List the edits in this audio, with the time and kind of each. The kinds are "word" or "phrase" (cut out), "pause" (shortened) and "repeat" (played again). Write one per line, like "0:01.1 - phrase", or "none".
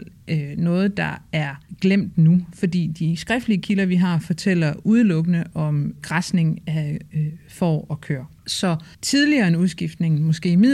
0:08.9 - pause